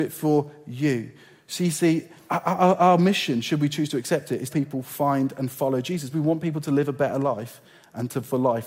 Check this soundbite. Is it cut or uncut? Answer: cut